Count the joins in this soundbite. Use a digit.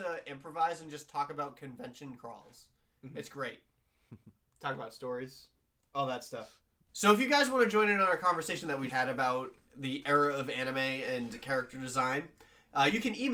1